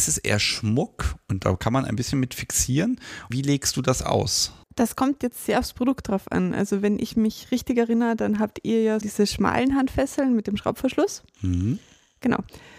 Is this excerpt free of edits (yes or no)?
no